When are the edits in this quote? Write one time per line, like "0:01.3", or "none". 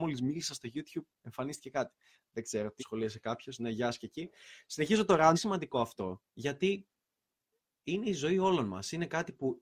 0:01.1
0:02.8
0:05.3
0:06.3

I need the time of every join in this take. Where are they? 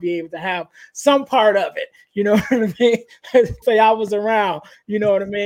0:03.6

